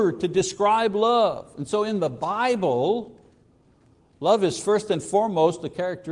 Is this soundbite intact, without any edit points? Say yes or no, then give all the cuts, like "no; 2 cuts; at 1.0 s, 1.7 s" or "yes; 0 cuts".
yes; 0 cuts